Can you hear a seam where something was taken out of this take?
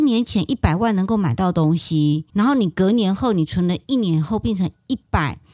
yes; 1 cut; at 2.3 s

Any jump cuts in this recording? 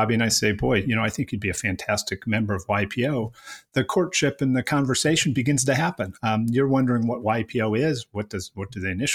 no; 0 cuts

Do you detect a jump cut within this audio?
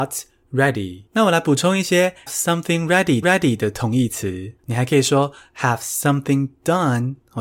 yes; 4 cuts; at 1.1 s, 2.3 s, 3.2 s, 4.6 s

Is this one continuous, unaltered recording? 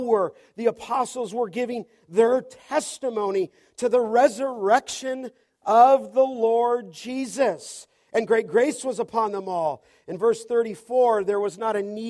yes; 0 cuts

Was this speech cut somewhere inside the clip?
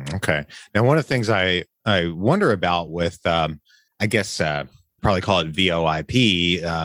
no; 0 cuts

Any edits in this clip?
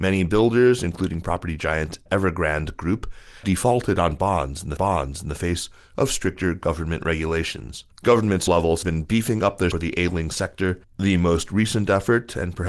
yes; 8 cuts; at 2.1 s, 3.4 s, 4.8 s, 7.9 s, 8.5 s, 8.8 s, 9.7 s, 10.8 s

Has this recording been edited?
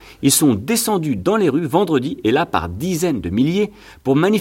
no; 0 cuts

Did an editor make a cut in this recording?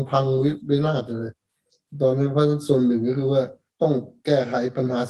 no; 0 cuts

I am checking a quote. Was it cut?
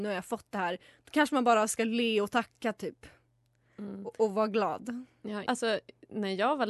yes; 1 cut; at 5.5 s

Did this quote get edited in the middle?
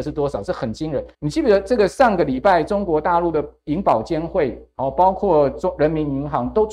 yes; 1 cut; at 1.1 s

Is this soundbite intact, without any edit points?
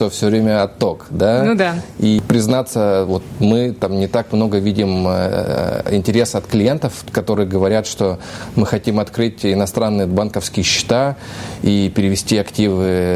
yes; 0 cuts

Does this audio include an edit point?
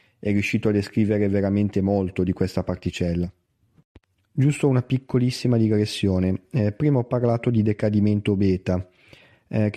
no; 0 cuts

